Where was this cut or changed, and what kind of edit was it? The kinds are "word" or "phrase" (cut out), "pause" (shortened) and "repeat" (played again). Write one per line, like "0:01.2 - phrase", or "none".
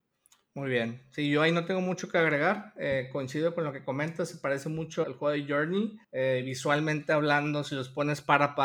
0:05.0 - word
0:06.0 - pause